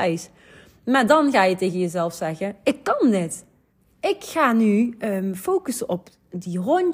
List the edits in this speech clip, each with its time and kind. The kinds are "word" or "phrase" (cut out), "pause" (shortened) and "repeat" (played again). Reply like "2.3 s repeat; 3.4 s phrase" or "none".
3.7 s pause